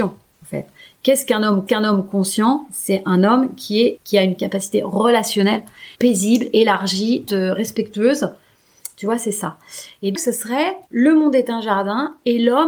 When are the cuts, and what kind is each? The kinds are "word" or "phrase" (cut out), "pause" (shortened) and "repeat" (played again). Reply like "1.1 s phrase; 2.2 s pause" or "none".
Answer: 1.7 s repeat; 4.0 s phrase; 4.4 s phrase; 5.9 s pause; 7.3 s word; 10.1 s word; 10.9 s pause